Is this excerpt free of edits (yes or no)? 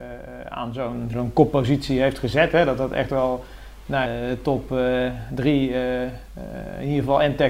no